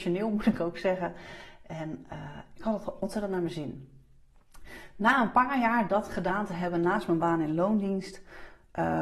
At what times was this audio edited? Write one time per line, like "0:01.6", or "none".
none